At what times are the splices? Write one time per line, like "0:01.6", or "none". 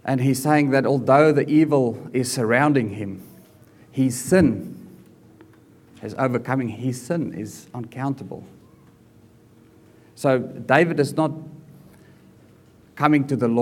none